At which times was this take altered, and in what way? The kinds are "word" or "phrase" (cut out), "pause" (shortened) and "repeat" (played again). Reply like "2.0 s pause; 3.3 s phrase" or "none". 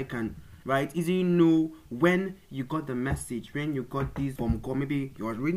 4.4 s word